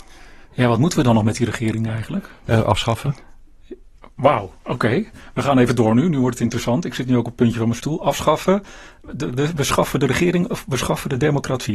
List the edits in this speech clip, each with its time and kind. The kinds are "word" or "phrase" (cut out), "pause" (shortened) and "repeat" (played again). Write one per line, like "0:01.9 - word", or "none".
none